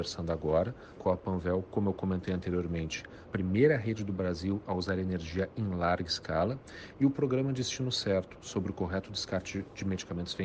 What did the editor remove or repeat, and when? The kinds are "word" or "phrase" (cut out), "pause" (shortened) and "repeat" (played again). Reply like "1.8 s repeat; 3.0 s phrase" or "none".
1.0 s word; 3.3 s phrase